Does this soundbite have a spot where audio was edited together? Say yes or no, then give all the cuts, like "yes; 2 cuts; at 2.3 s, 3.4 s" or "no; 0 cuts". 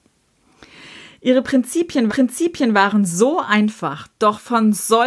yes; 1 cut; at 2.1 s